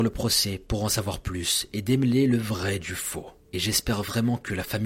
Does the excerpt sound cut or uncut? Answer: uncut